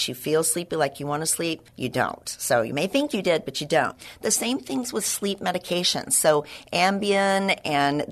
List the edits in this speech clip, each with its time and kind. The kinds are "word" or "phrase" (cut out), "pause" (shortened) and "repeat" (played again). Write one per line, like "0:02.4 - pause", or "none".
0:01.7 - pause